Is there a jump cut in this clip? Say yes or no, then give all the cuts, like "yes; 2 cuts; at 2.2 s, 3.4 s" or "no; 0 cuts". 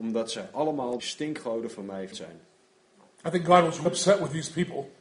yes; 3 cuts; at 1.0 s, 2.1 s, 3.9 s